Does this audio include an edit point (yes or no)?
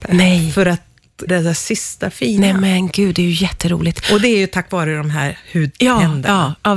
yes